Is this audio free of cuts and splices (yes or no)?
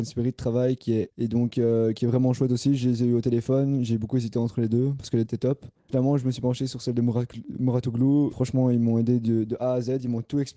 no